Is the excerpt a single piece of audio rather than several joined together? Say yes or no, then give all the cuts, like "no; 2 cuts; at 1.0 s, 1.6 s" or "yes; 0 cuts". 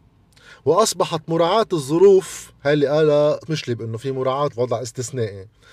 no; 2 cuts; at 3.5 s, 4.5 s